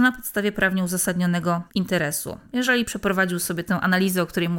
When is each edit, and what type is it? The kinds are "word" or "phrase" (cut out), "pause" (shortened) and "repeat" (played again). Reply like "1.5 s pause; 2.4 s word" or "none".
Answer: 1.7 s pause